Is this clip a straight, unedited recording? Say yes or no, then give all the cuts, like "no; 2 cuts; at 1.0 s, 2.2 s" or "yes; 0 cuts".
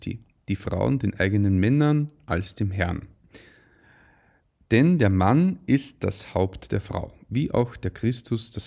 yes; 0 cuts